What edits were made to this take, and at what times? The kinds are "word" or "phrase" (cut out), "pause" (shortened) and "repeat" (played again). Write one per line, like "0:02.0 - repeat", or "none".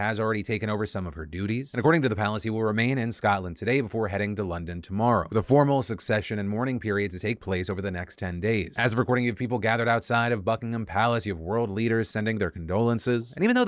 none